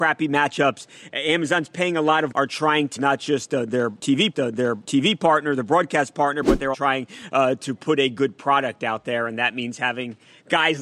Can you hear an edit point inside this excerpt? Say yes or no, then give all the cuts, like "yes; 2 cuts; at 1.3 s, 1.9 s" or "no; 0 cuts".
yes; 4 cuts; at 2.3 s, 3.0 s, 4.3 s, 6.7 s